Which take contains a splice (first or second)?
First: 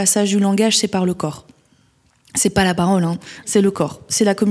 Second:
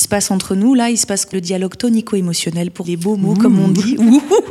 second